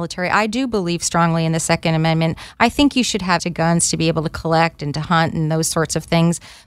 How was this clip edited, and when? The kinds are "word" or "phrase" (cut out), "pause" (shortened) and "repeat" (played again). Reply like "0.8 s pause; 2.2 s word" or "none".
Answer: 3.4 s word